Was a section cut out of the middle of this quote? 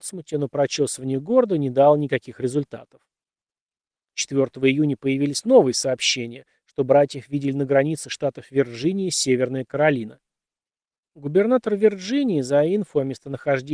no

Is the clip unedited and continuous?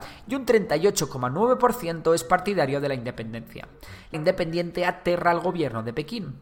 no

